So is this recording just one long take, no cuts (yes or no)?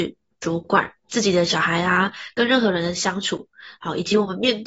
no